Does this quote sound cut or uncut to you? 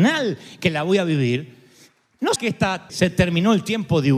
cut